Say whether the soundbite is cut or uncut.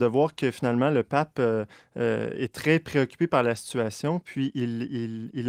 uncut